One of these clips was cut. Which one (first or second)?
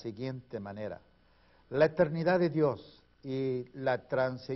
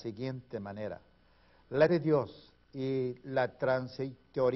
second